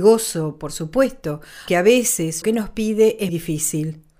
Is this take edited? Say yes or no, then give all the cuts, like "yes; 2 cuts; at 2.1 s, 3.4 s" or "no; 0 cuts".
yes; 3 cuts; at 1.7 s, 2.4 s, 3.3 s